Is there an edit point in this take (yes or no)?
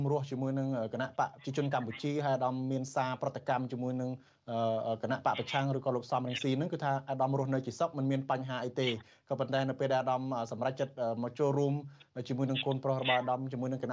no